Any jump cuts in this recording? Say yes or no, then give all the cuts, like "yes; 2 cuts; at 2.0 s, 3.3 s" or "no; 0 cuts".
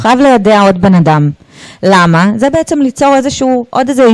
no; 0 cuts